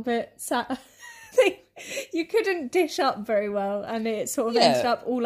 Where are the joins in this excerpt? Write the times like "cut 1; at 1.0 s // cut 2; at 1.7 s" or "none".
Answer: none